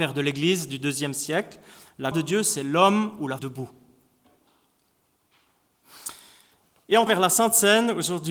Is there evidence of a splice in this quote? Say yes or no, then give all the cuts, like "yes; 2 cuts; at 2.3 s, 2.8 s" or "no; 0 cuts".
yes; 3 cuts; at 2.1 s, 3.4 s, 7.1 s